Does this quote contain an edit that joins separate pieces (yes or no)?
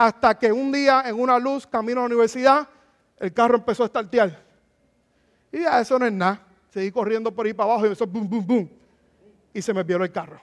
no